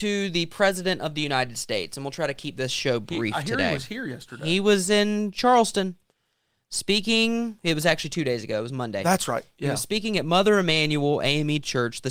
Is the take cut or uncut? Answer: uncut